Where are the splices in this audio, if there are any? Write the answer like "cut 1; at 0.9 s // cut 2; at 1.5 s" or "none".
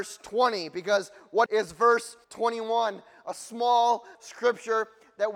cut 1; at 1.5 s // cut 2; at 2.2 s // cut 3; at 4.1 s